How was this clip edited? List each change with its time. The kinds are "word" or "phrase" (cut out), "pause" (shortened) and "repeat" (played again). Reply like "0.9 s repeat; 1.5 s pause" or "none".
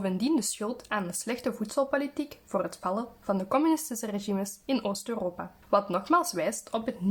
5.6 s pause